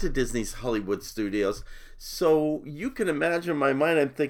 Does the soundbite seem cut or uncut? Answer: uncut